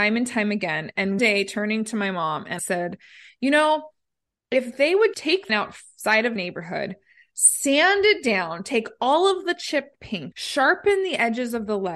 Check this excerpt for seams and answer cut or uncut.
cut